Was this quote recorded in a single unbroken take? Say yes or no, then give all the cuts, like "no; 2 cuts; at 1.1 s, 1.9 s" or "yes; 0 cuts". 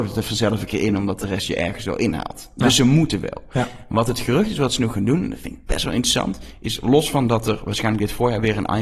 yes; 0 cuts